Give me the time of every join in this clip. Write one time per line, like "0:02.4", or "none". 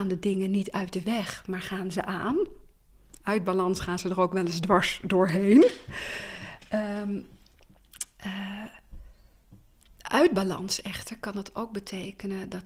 none